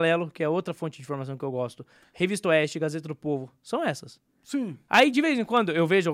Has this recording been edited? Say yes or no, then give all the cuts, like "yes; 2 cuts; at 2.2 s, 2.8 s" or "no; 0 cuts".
no; 0 cuts